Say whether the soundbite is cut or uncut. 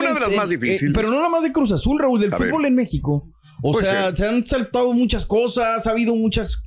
uncut